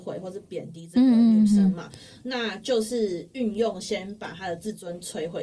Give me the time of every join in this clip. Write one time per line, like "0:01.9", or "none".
none